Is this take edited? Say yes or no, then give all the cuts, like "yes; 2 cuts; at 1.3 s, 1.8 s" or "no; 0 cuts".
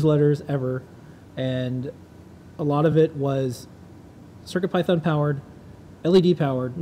no; 0 cuts